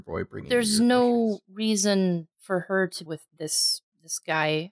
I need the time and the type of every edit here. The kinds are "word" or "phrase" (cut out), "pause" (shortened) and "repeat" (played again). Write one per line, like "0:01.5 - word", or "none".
0:02.3 - pause
0:03.1 - phrase